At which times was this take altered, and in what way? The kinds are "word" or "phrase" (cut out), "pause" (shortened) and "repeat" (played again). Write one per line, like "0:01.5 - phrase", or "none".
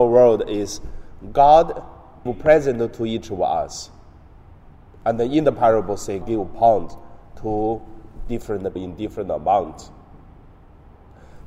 0:02.3 - word
0:06.2 - word
0:08.8 - word